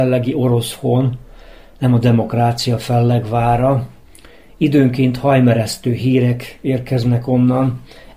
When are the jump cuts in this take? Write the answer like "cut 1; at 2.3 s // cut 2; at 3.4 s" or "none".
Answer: none